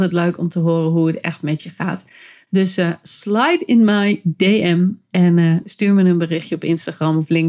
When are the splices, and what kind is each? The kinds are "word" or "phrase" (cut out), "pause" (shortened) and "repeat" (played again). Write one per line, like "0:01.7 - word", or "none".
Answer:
none